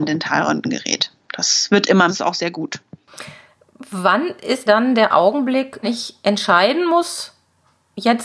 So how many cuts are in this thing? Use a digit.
3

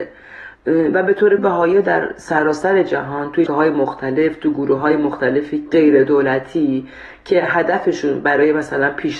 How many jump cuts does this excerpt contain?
2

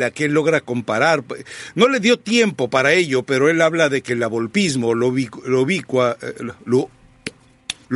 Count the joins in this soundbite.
0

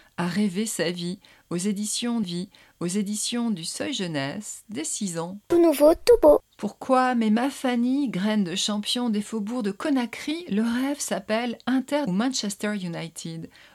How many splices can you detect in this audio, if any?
2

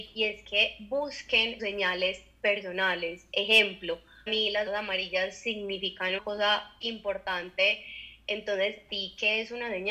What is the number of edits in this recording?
6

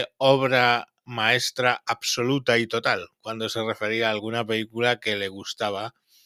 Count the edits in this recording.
0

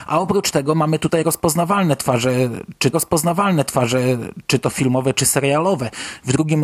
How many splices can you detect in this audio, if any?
1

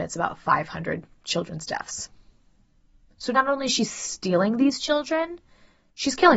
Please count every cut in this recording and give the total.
0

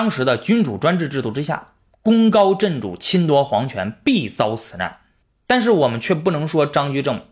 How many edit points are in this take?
1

